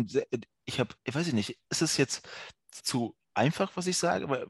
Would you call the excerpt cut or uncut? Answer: cut